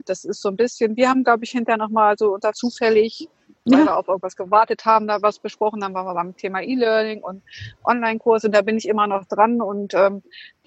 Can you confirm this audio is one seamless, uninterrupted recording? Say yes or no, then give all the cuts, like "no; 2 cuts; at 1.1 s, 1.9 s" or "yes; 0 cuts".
no; 1 cut; at 2.5 s